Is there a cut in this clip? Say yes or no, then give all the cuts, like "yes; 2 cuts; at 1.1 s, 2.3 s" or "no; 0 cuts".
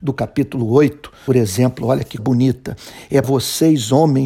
yes; 3 cuts; at 1.3 s, 2.2 s, 3.2 s